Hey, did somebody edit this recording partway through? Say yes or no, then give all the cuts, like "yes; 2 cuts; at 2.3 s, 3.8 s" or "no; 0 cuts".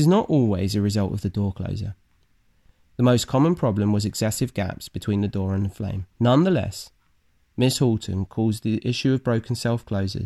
yes; 1 cut; at 6.1 s